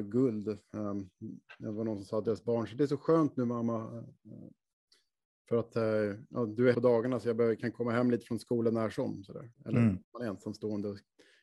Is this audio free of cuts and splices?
no; 3 cuts; at 6.7 s, 9.5 s, 10.0 s

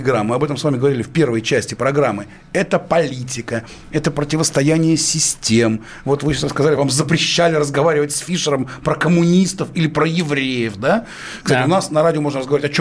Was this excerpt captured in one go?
yes; 0 cuts

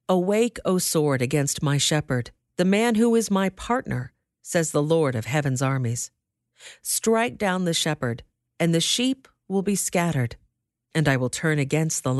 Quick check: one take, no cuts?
yes; 0 cuts

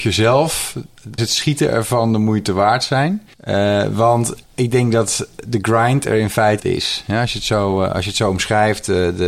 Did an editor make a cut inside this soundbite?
yes; 4 cuts; at 1.2 s, 3.3 s, 4.4 s, 6.6 s

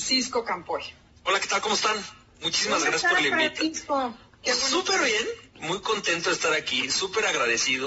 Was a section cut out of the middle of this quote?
no; 0 cuts

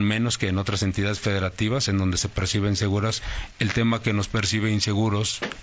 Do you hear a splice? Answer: no; 0 cuts

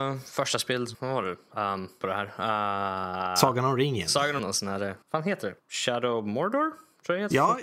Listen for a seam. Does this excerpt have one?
yes; 5 cuts; at 0.9 s, 2.0 s, 4.4 s, 5.0 s, 5.6 s

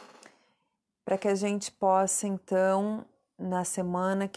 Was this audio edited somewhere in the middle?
no; 0 cuts

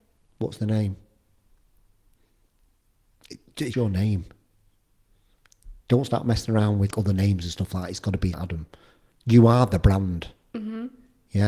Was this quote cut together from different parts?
yes; 3 cuts; at 3.7 s, 6.9 s, 8.3 s

